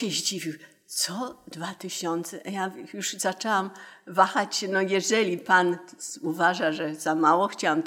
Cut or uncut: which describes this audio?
uncut